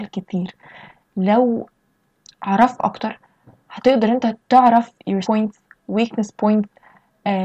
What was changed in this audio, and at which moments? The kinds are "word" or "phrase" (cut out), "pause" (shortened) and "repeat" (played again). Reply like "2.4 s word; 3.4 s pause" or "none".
2.8 s word; 5.2 s word